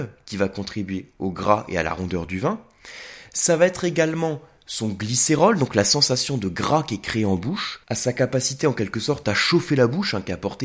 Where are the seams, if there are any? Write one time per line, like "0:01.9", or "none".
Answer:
0:07.8